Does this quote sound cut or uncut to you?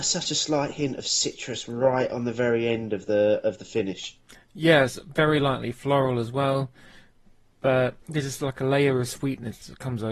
cut